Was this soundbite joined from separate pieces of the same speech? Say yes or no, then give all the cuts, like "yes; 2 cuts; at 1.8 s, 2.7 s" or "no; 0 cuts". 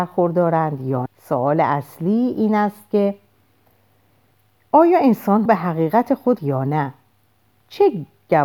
yes; 3 cuts; at 1.1 s, 5.5 s, 6.4 s